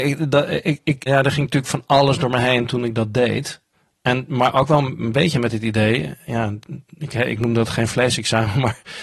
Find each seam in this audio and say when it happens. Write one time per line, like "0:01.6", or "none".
0:01.1
0:03.7
0:06.9